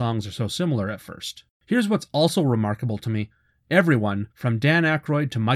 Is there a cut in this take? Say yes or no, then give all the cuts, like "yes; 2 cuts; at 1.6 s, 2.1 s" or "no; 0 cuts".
yes; 2 cuts; at 1.5 s, 4.3 s